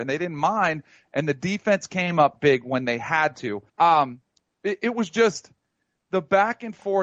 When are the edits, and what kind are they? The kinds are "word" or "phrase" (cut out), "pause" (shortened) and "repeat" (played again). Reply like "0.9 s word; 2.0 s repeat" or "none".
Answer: 3.7 s pause